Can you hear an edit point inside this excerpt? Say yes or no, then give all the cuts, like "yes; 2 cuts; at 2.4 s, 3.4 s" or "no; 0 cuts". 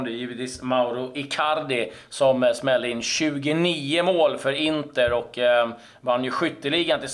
no; 0 cuts